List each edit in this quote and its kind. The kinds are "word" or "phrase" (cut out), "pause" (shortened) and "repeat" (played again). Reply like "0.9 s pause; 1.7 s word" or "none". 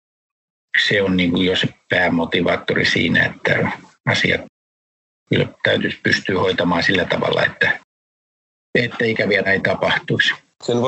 9.5 s word